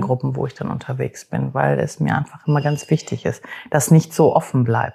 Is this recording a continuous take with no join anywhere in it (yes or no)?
yes